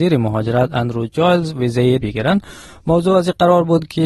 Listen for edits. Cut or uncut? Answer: cut